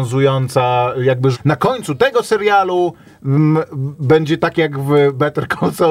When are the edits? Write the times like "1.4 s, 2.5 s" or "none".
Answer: 1.3 s